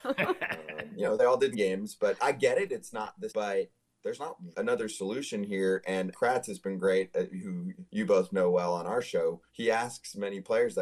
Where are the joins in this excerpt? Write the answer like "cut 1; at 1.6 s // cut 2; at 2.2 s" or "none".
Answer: cut 1; at 1.5 s // cut 2; at 2.2 s // cut 3; at 3.3 s // cut 4; at 4.5 s // cut 5; at 6.1 s // cut 6; at 7.9 s // cut 7; at 9.5 s